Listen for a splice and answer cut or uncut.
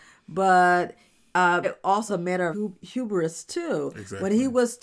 cut